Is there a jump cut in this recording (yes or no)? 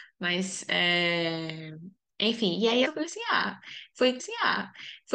yes